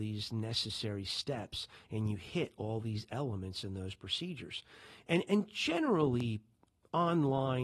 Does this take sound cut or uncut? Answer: uncut